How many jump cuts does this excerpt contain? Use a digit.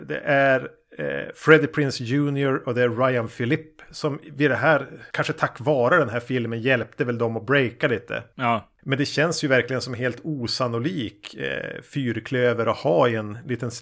1